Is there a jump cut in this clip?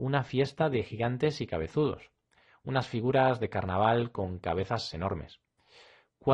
no; 0 cuts

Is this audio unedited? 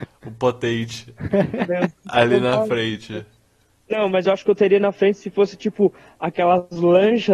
yes; 0 cuts

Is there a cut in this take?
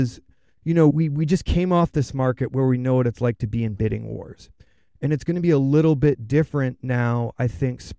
yes; 1 cut; at 0.9 s

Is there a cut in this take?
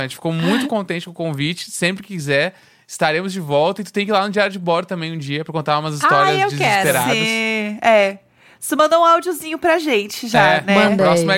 no; 0 cuts

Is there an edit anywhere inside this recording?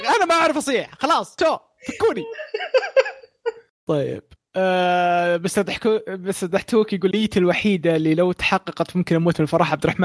yes; 1 cut; at 7.1 s

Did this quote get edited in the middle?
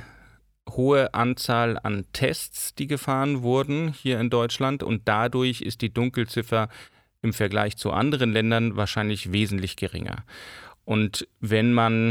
no; 0 cuts

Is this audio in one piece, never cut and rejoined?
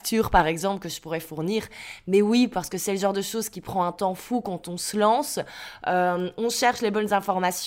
yes; 0 cuts

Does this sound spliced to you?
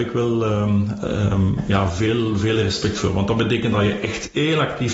no; 0 cuts

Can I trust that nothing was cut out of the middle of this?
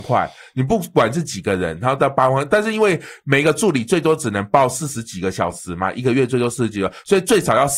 yes; 0 cuts

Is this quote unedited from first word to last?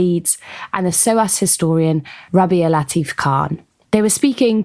yes; 0 cuts

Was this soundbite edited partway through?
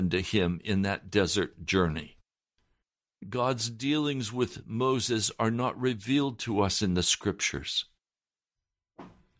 no; 0 cuts

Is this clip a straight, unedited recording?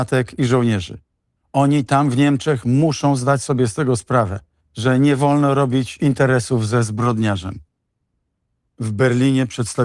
yes; 0 cuts

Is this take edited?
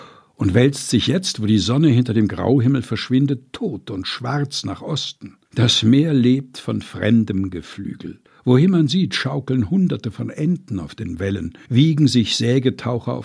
yes; 3 cuts; at 5.5 s, 8.3 s, 11.7 s

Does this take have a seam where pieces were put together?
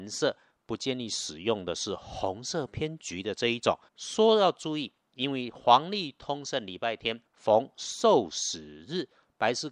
yes; 2 cuts; at 3.9 s, 7.2 s

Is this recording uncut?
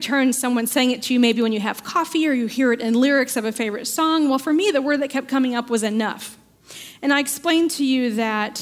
yes; 0 cuts

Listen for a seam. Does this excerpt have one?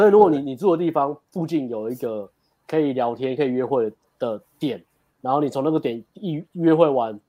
no; 0 cuts

